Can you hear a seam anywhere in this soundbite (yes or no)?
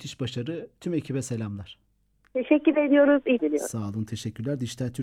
yes